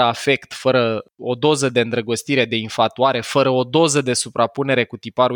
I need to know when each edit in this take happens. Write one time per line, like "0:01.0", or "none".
0:01.1